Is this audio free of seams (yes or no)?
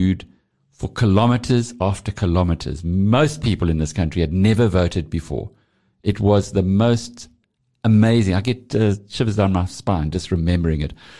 yes